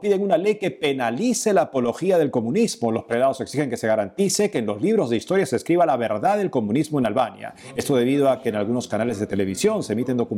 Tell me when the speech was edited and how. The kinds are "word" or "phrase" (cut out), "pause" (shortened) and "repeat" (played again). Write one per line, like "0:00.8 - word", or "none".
none